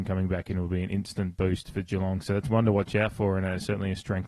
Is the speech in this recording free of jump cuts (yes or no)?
yes